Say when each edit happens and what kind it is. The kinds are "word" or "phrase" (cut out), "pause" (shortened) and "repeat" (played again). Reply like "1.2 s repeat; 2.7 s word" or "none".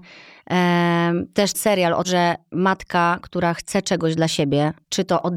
1.5 s word; 2.0 s word